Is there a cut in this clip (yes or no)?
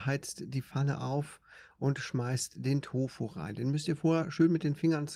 no